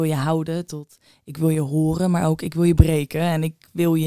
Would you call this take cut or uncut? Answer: uncut